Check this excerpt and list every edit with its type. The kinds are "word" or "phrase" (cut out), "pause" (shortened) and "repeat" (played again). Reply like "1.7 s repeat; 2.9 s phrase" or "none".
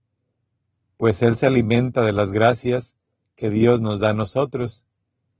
none